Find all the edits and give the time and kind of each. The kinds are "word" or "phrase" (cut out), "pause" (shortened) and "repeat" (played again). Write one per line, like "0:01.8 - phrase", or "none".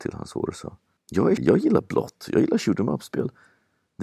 0:01.0 - pause
0:01.4 - word